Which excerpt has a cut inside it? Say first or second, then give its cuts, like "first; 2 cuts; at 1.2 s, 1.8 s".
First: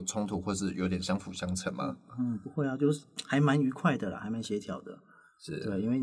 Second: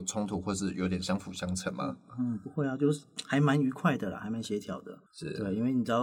second; 1 cut; at 5.1 s